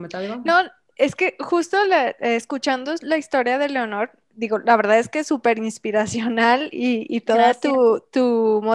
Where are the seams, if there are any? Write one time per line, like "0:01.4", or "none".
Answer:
none